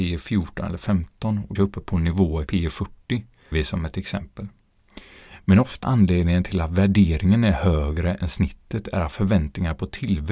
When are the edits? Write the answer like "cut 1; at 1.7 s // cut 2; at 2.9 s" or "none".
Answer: cut 1; at 1.6 s // cut 2; at 2.5 s // cut 3; at 3.5 s // cut 4; at 5.8 s